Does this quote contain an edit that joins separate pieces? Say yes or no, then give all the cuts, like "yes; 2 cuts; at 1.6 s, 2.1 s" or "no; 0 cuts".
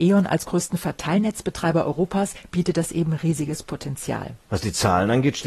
yes; 1 cut; at 4.4 s